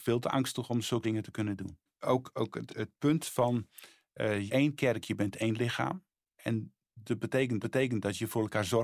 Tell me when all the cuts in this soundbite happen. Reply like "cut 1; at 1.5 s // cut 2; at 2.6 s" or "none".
cut 1; at 1.0 s // cut 2; at 1.9 s // cut 3; at 2.7 s // cut 4; at 4.5 s // cut 5; at 7.6 s